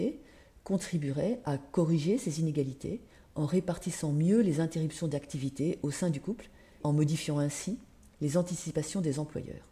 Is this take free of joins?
no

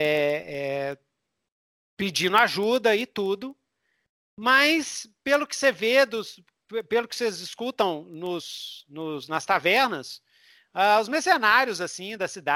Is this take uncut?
yes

